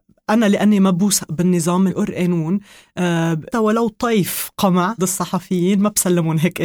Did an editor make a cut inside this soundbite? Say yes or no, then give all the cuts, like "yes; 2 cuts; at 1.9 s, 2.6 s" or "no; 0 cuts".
yes; 3 cuts; at 1.9 s, 3.5 s, 5.0 s